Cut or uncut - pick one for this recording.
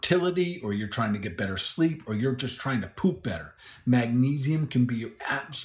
uncut